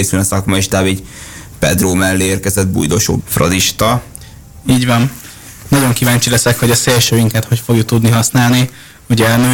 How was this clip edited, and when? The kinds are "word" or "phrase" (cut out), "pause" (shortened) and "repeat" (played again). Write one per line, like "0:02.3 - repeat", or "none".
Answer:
0:03.2 - phrase